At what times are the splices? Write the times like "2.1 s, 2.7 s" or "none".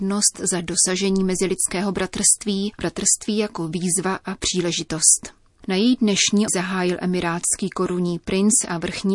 2.8 s, 6.5 s